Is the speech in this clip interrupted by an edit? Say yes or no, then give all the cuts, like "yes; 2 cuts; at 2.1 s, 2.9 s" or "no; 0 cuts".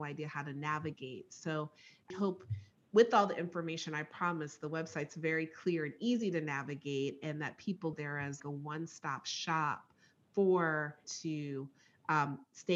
yes; 5 cuts; at 2.1 s, 2.7 s, 7.9 s, 8.4 s, 11.0 s